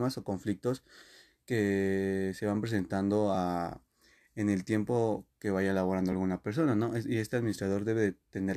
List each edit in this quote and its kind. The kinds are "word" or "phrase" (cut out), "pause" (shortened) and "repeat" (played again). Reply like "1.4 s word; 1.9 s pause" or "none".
none